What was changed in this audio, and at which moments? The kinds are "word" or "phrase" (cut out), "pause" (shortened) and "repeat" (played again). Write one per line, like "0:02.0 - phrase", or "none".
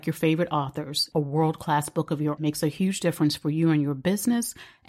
0:01.1 - phrase
0:02.4 - phrase